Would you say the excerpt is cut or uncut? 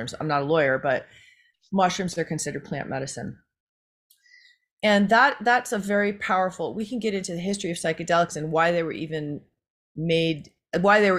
uncut